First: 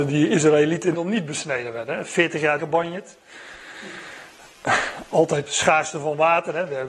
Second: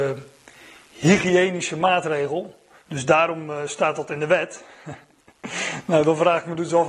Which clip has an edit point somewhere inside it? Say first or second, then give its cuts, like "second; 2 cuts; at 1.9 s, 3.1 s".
first; 3 cuts; at 0.9 s, 2.6 s, 5.5 s